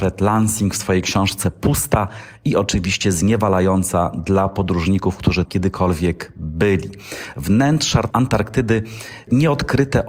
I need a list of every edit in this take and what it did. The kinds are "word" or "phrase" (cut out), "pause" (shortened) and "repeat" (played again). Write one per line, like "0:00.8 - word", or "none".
0:05.5 - word